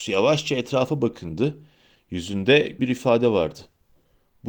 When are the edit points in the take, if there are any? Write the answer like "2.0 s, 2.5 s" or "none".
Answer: 2.8 s